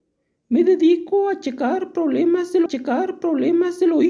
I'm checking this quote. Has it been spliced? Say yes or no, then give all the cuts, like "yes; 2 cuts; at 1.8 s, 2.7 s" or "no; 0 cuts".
yes; 1 cut; at 2.7 s